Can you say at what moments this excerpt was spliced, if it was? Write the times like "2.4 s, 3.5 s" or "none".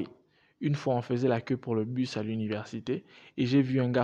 none